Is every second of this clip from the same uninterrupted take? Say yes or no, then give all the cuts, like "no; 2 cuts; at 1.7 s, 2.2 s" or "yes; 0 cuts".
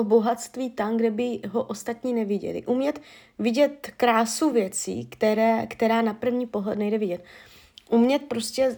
yes; 0 cuts